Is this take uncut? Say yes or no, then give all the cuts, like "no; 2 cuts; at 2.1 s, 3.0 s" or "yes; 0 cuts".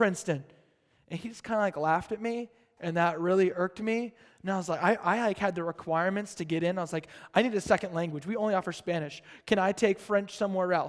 yes; 0 cuts